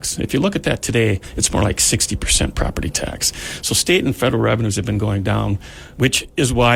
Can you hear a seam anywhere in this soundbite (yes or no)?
no